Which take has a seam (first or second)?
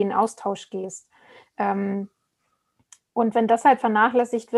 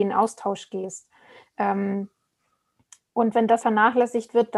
second